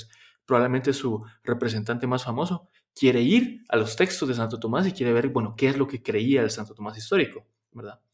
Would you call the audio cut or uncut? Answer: uncut